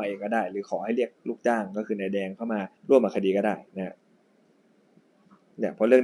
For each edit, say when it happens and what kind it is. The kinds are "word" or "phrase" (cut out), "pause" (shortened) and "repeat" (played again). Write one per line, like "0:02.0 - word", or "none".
0:02.8 - pause